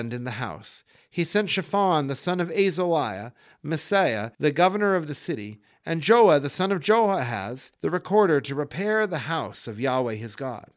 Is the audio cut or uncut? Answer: cut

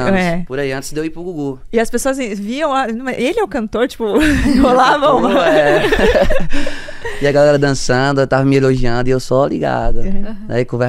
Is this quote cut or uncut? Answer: uncut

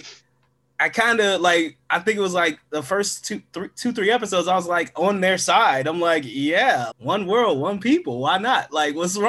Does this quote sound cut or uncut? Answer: cut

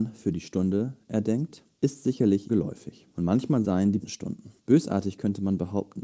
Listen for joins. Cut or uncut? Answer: cut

